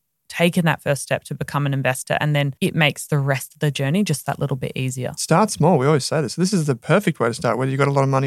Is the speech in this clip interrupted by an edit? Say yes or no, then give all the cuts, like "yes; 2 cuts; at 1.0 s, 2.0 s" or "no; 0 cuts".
yes; 1 cut; at 2.6 s